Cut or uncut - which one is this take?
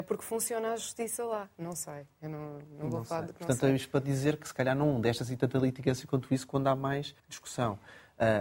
cut